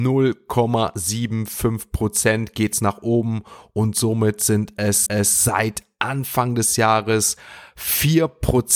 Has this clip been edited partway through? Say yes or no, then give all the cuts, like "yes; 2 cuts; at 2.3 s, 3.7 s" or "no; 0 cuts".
yes; 1 cut; at 5.1 s